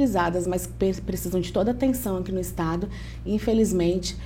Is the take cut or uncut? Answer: uncut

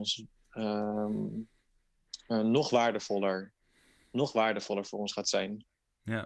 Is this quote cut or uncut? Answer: uncut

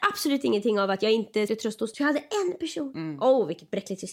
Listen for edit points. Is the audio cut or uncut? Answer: cut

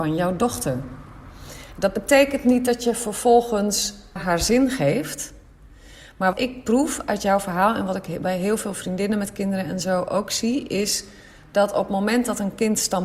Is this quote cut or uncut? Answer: cut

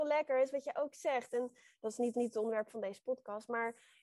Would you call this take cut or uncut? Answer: cut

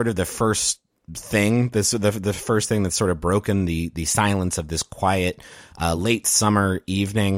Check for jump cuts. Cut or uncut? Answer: uncut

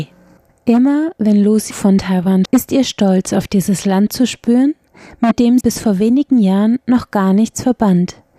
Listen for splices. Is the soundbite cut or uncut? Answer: cut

